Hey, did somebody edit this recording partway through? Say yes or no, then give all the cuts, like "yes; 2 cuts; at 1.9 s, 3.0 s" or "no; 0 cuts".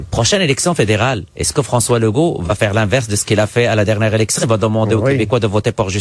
yes; 1 cut; at 1.3 s